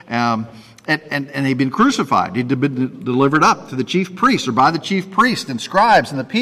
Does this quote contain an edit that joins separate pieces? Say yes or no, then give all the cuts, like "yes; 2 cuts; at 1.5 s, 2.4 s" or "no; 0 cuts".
no; 0 cuts